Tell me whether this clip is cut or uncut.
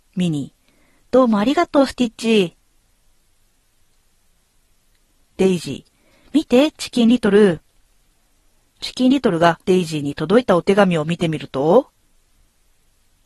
cut